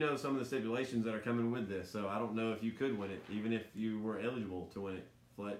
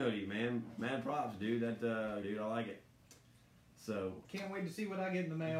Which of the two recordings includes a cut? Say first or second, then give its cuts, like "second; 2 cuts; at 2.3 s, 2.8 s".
second; 2 cuts; at 2.2 s, 4.2 s